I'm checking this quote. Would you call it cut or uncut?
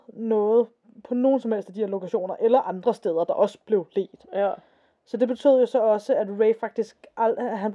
uncut